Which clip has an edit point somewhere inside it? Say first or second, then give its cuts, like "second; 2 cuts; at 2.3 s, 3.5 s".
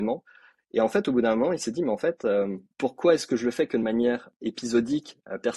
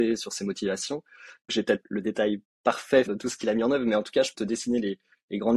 second; 4 cuts; at 1.5 s, 1.8 s, 3.1 s, 4.3 s